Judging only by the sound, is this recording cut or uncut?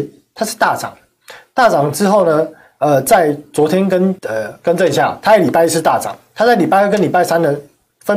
cut